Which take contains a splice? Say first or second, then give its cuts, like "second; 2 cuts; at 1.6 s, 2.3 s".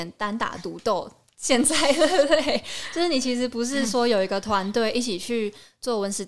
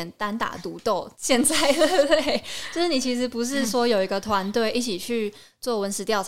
second; 1 cut; at 1.1 s